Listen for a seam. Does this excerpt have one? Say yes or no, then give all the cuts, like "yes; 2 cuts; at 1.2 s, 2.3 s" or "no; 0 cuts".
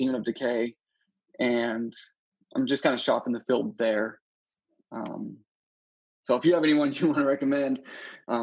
no; 0 cuts